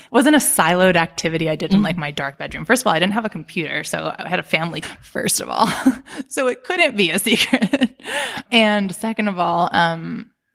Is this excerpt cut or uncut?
cut